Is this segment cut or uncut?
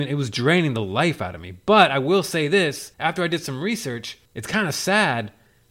cut